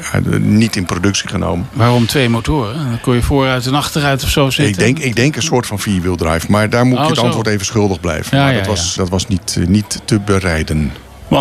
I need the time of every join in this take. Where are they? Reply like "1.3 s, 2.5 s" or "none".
9.0 s